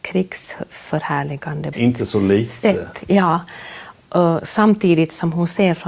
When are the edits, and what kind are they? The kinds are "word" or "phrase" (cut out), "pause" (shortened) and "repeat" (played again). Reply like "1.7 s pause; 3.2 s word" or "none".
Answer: 1.7 s word